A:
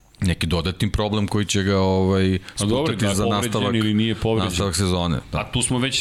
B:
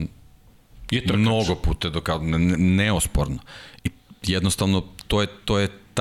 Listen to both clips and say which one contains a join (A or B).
A